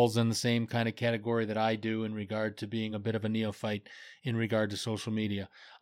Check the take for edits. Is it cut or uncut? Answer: uncut